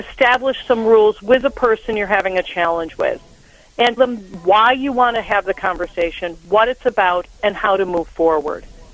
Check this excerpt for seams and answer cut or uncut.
cut